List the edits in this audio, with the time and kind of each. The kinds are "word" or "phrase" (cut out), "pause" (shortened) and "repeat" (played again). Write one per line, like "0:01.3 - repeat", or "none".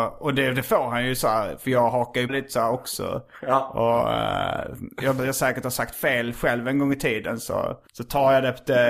0:02.3 - word
0:05.2 - phrase
0:07.9 - pause